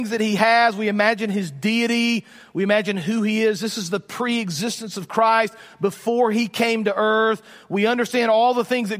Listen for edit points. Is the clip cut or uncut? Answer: uncut